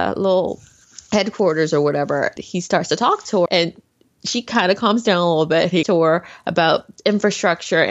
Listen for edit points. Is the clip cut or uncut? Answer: cut